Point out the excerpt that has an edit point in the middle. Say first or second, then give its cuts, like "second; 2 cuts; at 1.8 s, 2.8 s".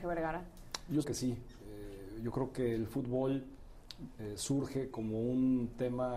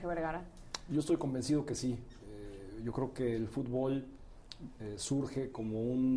first; 1 cut; at 1.0 s